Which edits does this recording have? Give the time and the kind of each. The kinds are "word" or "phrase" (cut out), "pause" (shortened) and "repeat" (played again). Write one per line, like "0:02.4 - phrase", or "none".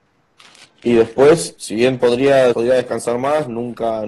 0:01.6 - word
0:02.5 - word